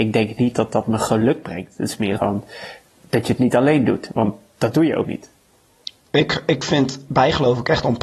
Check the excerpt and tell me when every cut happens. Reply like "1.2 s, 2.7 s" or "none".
2.2 s, 5.0 s